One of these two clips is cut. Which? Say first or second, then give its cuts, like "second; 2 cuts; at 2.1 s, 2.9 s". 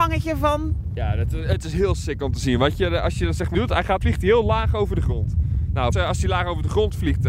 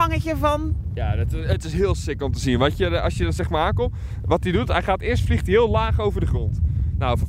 first; 3 cuts; at 3.5 s, 4.0 s, 5.9 s